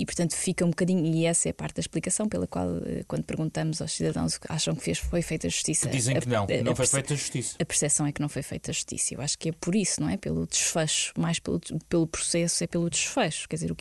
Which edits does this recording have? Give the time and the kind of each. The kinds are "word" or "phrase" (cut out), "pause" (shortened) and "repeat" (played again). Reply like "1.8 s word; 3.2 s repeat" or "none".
9.6 s pause